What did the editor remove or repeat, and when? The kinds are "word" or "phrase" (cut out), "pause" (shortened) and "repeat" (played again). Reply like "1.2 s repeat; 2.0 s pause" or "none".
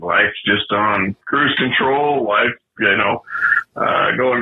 1.2 s pause

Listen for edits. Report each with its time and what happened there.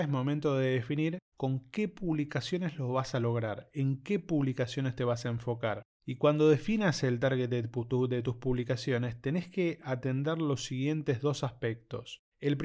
none

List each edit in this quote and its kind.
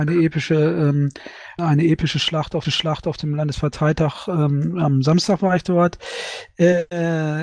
1.6 s phrase; 2.6 s repeat

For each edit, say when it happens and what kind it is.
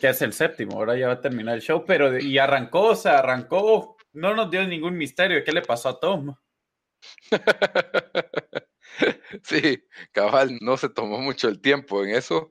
2.2 s word; 4.0 s pause; 10.6 s word

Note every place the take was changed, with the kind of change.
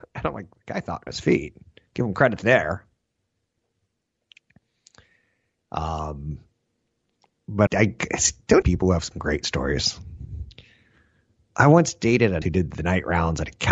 1.1 s phrase; 7.7 s word; 8.6 s phrase; 12.4 s word

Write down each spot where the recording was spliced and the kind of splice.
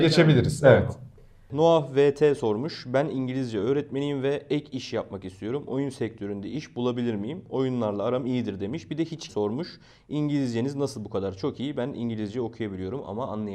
9.3 s word

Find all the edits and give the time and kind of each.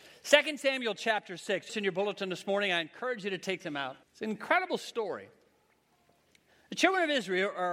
1.7 s phrase; 4.0 s pause

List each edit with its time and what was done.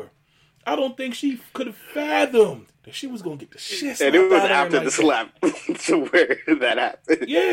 2.7 s pause

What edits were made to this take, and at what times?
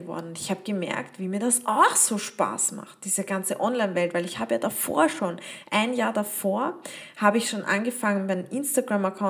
none

